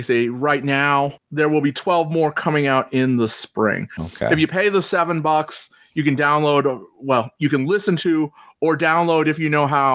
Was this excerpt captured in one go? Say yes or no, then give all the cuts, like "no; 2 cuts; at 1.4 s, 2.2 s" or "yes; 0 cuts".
yes; 0 cuts